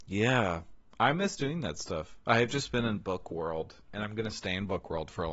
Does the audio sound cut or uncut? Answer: uncut